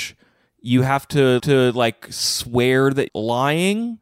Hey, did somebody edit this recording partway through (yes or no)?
yes